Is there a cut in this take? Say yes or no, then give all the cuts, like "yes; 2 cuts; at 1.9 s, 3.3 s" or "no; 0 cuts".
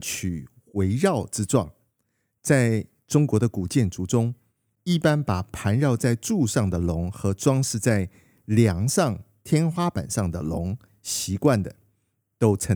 no; 0 cuts